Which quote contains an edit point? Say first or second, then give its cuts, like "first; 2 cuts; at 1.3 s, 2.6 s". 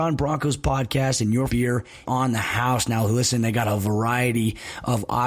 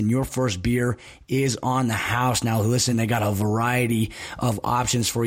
first; 2 cuts; at 1.5 s, 2.0 s